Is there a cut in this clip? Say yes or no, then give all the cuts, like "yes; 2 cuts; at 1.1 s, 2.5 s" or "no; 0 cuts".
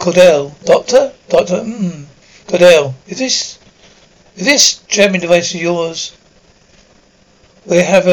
no; 0 cuts